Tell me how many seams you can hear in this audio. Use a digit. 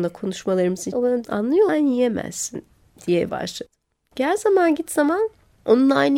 4